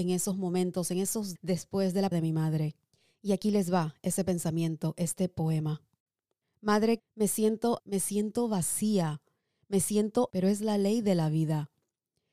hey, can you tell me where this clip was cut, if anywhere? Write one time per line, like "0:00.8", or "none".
0:01.4
0:02.1
0:07.0
0:07.8
0:10.3